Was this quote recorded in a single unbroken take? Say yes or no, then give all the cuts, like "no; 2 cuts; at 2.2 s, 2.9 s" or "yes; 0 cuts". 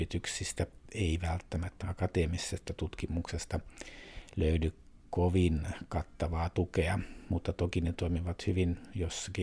no; 2 cuts; at 1.8 s, 5.0 s